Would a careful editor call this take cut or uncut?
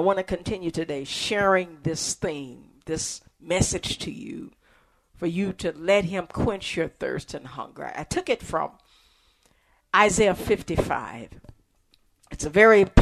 uncut